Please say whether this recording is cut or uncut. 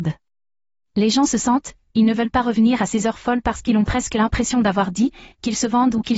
uncut